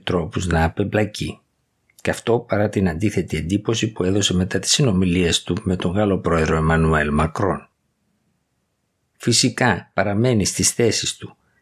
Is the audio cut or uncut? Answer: uncut